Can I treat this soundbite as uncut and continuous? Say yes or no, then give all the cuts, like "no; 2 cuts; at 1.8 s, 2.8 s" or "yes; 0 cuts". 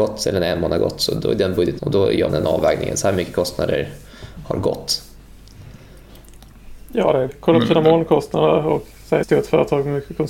no; 4 cuts; at 1.8 s, 2.3 s, 7.3 s, 9.2 s